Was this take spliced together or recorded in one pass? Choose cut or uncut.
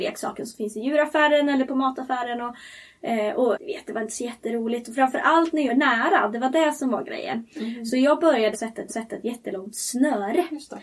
cut